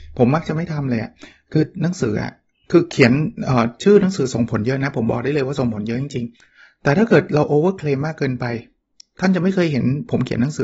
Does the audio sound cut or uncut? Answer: cut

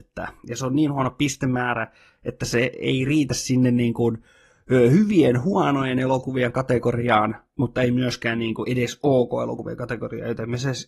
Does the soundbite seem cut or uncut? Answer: uncut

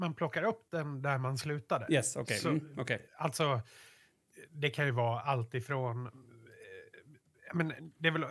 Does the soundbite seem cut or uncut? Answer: cut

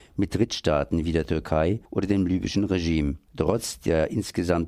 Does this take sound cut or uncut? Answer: cut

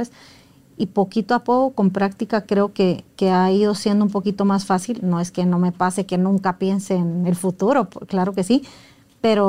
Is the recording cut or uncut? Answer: uncut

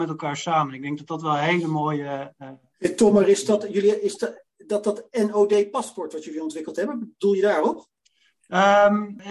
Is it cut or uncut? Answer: uncut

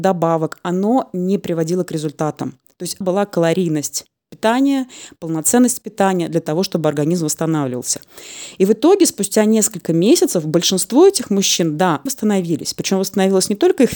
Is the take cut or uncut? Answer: cut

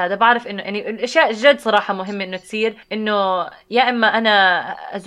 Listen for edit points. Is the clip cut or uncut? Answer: cut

